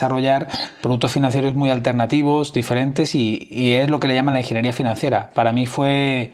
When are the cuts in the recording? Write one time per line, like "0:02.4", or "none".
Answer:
none